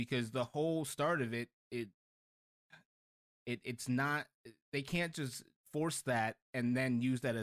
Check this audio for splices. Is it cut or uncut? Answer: uncut